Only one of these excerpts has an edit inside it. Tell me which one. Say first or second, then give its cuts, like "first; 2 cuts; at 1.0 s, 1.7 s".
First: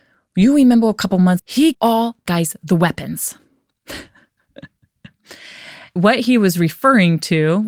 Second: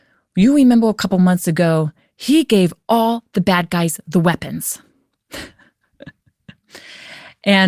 first; 4 cuts; at 1.4 s, 1.7 s, 2.3 s, 6.0 s